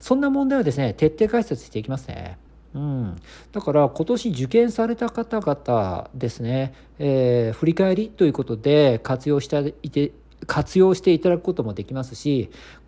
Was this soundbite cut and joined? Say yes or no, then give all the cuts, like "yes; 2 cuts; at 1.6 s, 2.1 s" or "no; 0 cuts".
no; 0 cuts